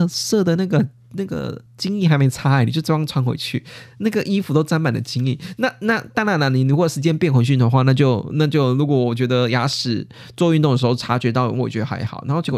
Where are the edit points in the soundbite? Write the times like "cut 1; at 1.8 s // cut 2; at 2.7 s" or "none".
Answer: cut 1; at 1.7 s